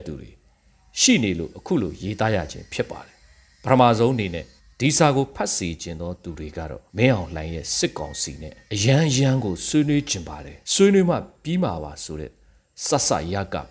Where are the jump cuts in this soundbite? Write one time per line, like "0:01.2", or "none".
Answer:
0:03.5
0:04.6
0:06.9
0:08.6
0:10.6

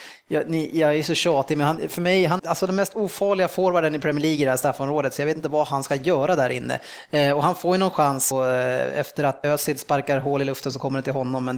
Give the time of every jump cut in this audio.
0:02.4
0:08.3
0:09.4

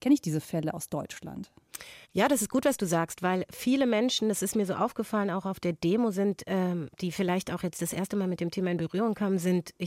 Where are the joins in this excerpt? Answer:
0:02.0
0:06.9

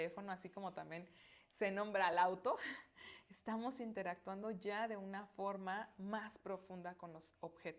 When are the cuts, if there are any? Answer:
none

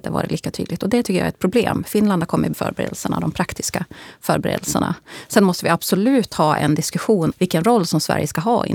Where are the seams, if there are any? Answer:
0:02.5
0:07.3

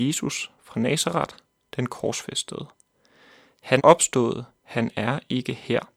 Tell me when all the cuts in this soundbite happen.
0:03.8

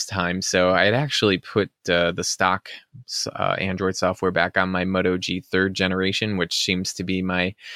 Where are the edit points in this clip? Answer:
none

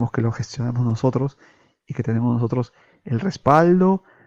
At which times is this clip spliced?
none

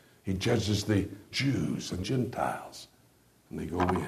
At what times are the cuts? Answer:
0:01.3
0:02.0

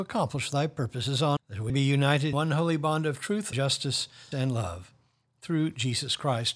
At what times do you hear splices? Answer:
0:01.4
0:01.7
0:02.3
0:03.5
0:04.3

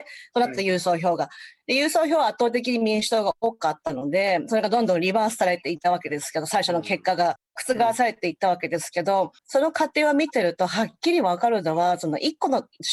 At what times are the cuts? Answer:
0:07.5
0:09.4

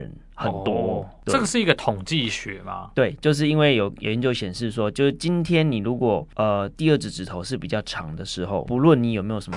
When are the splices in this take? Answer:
0:08.7

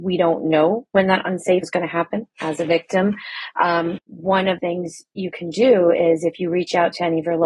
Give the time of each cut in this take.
0:01.6
0:04.0
0:04.6

